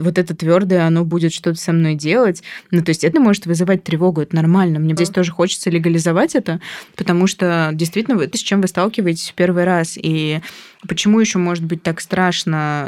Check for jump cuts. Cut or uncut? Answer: cut